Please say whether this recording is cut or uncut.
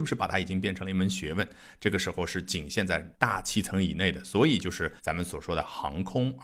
cut